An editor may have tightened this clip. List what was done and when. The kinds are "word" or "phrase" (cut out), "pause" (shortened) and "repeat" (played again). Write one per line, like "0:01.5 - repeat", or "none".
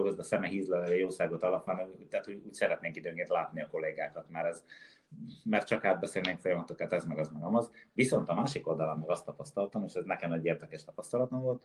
none